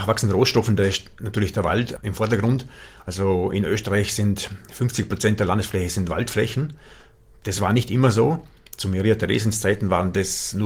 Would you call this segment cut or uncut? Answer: uncut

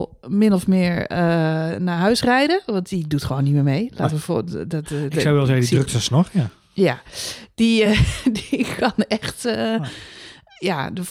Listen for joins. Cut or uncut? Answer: uncut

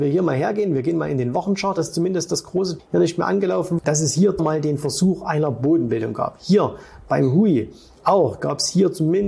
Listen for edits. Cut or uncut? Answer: cut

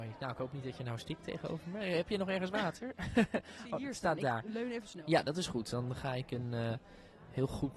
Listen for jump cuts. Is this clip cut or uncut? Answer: uncut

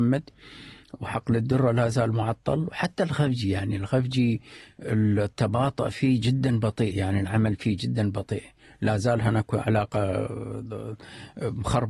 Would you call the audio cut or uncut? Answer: uncut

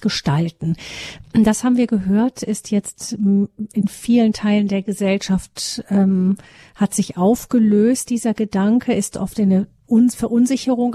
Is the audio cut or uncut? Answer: uncut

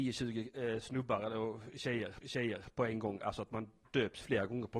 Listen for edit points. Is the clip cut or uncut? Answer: cut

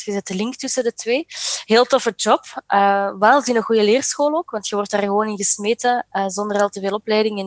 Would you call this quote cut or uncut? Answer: uncut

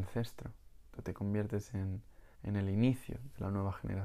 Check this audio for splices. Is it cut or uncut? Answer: cut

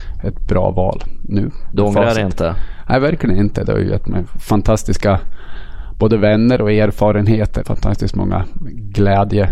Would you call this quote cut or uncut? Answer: cut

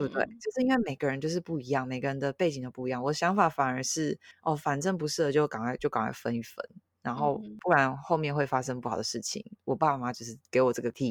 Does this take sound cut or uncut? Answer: uncut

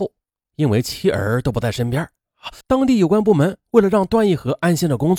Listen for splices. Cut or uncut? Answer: cut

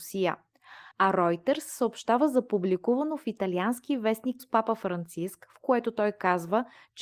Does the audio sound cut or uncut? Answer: cut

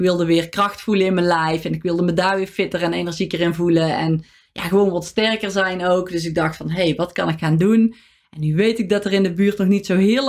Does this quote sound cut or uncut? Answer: uncut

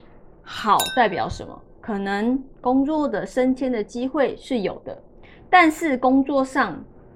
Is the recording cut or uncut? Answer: uncut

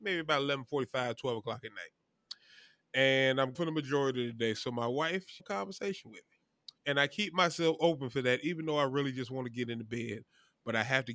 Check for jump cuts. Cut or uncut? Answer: cut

